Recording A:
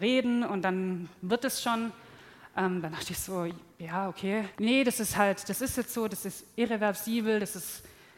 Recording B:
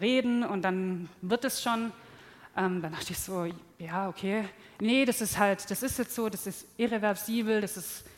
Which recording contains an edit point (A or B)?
A